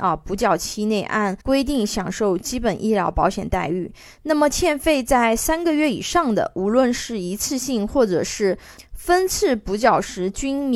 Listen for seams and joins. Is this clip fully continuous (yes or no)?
no